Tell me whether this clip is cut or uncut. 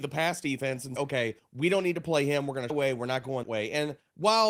cut